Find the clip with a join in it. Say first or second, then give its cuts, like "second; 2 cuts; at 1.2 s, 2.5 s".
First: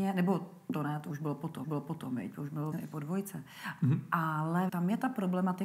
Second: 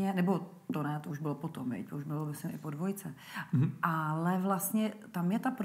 first; 3 cuts; at 1.6 s, 2.7 s, 4.7 s